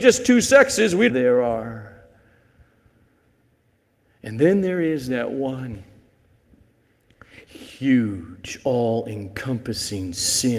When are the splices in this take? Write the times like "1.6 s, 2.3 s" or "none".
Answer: 1.1 s